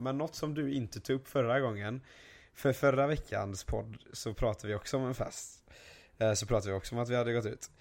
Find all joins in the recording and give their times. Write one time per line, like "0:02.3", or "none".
none